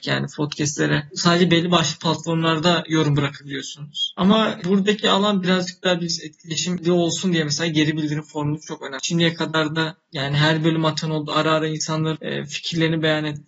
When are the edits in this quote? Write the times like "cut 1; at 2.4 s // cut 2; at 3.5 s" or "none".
cut 1; at 4.6 s